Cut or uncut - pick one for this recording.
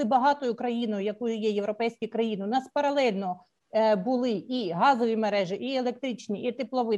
uncut